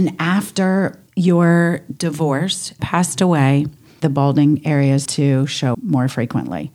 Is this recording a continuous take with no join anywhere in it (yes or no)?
no